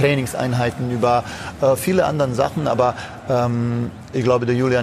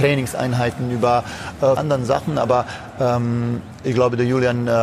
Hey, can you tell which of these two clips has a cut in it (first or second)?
second